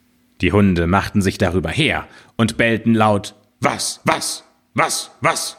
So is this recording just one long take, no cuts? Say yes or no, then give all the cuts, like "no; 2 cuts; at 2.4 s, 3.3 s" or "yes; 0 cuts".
yes; 0 cuts